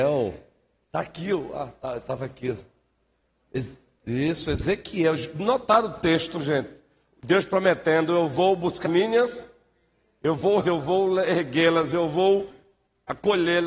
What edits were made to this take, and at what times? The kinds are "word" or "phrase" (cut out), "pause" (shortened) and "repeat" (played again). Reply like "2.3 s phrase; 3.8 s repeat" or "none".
8.8 s word; 10.6 s word